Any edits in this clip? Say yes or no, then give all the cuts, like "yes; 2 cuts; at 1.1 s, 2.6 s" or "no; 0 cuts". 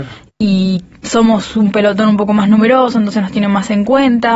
no; 0 cuts